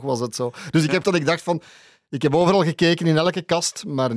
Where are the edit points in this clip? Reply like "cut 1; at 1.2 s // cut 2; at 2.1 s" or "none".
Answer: cut 1; at 1.0 s